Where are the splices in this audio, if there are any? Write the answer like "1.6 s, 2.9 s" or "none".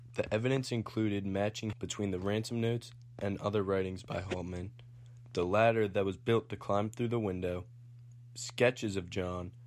1.7 s